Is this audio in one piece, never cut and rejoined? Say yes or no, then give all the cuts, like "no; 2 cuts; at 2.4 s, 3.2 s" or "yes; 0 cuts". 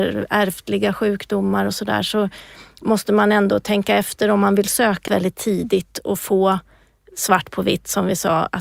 no; 1 cut; at 5.1 s